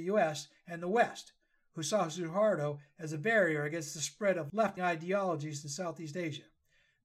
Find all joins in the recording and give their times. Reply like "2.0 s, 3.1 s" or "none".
4.8 s